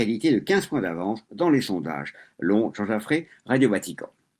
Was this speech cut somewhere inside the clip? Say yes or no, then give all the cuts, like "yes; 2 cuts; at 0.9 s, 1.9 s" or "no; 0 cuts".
no; 0 cuts